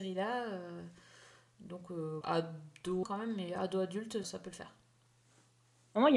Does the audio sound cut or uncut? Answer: cut